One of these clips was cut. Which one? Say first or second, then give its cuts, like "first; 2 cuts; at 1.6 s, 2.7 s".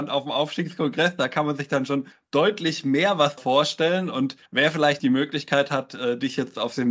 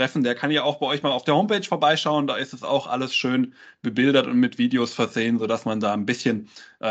first; 4 cuts; at 2.1 s, 3.4 s, 4.5 s, 5.0 s